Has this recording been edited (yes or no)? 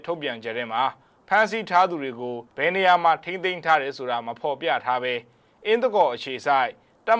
yes